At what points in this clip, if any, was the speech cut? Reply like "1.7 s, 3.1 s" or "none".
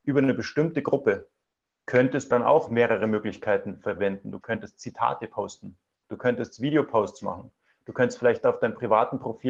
2.3 s, 6.0 s